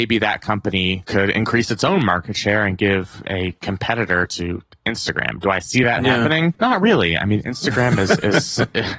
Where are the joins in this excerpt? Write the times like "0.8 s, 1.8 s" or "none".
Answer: none

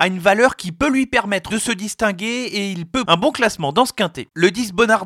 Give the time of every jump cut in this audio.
1.5 s, 3.0 s

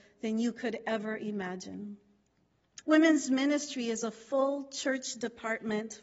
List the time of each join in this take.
2.8 s

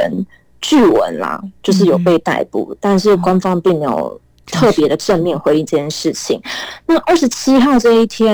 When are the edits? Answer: none

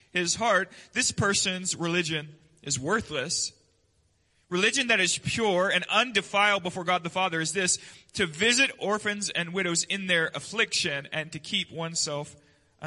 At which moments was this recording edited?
none

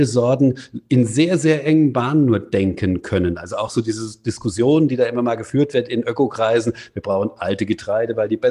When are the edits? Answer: none

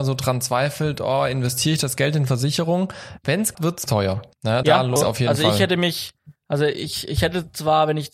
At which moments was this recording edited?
3.5 s, 3.9 s, 4.3 s, 4.6 s, 5.0 s, 6.4 s

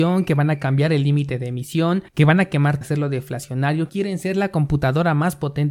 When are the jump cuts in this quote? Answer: 2.1 s, 2.8 s, 3.9 s

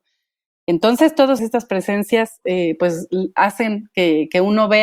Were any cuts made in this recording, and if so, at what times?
1.4 s

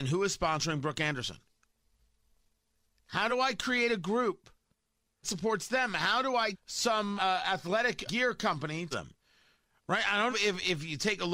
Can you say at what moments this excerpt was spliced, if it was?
3.3 s, 5.2 s, 6.5 s, 7.2 s, 8.1 s, 8.9 s, 10.3 s

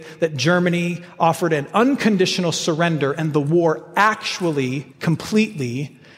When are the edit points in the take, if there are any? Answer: 4.9 s

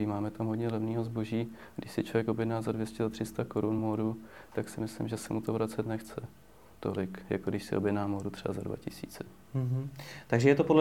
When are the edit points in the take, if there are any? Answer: none

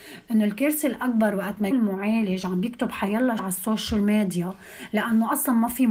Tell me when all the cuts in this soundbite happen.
1.7 s, 3.4 s

